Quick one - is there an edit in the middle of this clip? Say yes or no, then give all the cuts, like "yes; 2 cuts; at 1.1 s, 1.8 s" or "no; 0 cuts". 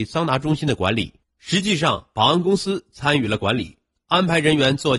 no; 0 cuts